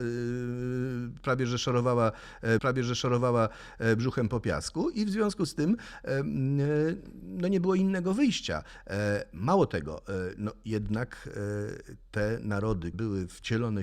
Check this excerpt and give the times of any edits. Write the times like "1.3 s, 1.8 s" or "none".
2.6 s, 12.9 s